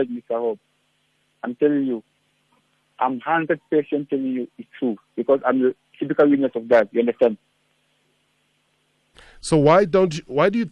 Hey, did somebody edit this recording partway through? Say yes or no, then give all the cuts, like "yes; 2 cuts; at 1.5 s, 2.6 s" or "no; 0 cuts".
no; 0 cuts